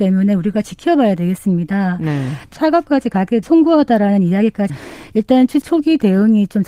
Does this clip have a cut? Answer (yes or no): yes